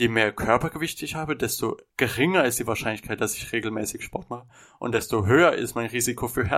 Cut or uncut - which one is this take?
uncut